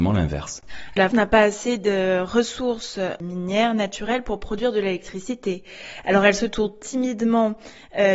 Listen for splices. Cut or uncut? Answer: cut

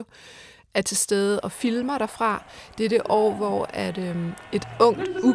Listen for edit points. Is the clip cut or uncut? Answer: uncut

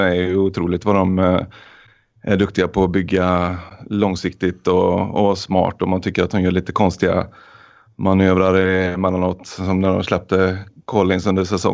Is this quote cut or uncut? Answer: uncut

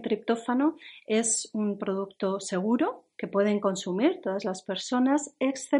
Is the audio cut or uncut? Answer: cut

